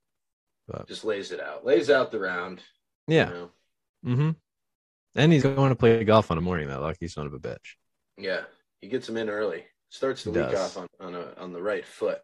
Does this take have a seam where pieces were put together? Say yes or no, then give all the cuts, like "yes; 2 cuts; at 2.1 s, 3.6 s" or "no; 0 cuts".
yes; 3 cuts; at 5.4 s, 6.4 s, 10.9 s